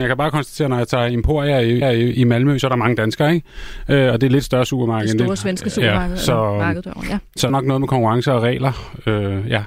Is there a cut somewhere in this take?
yes; 2 cuts; at 1.8 s, 7.5 s

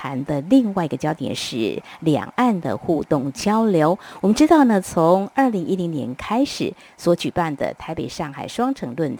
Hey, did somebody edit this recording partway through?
no; 0 cuts

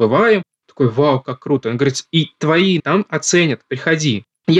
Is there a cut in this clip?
yes; 1 cut; at 2.8 s

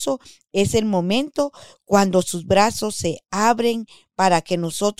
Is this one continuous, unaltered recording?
yes; 0 cuts

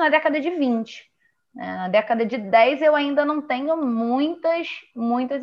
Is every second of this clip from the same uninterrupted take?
yes; 0 cuts

